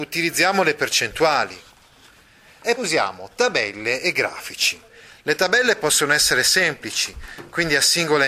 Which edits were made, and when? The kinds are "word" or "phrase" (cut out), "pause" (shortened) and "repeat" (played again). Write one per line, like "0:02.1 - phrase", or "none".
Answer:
0:02.8 - word